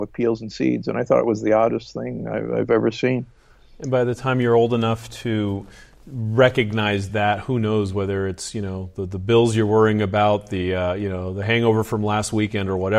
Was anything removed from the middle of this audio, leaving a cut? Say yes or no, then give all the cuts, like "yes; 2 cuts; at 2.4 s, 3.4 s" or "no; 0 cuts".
no; 0 cuts